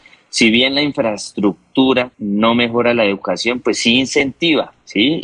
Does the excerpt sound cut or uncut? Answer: cut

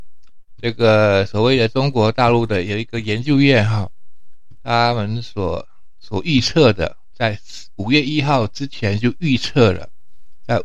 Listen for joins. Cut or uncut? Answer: uncut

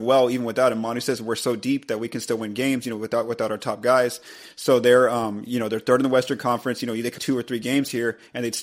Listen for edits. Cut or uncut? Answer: cut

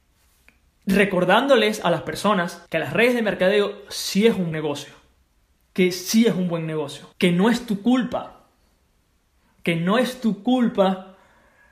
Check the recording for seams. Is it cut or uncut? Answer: cut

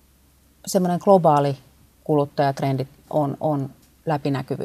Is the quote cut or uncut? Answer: cut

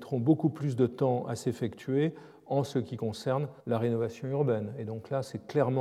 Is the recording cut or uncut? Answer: cut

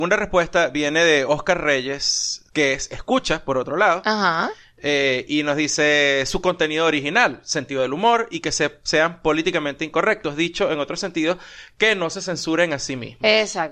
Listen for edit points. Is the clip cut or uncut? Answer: cut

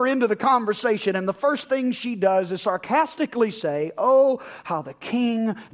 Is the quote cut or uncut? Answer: uncut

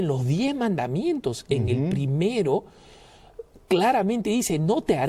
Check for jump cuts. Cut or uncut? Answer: uncut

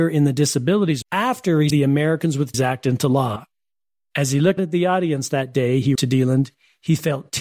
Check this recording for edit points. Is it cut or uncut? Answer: cut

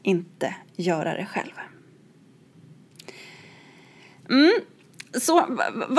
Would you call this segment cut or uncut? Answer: uncut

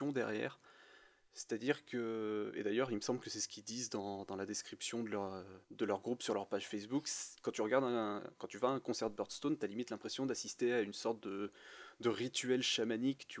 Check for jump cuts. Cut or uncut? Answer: cut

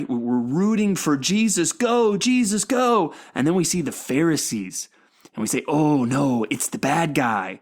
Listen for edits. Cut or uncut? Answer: uncut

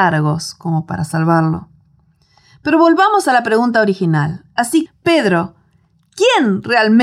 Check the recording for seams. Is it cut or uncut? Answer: cut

